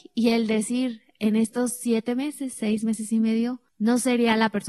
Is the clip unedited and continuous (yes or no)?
no